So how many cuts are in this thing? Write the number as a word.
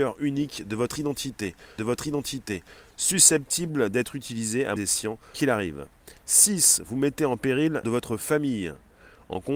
four